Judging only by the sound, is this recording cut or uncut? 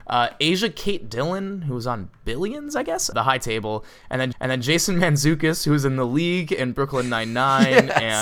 cut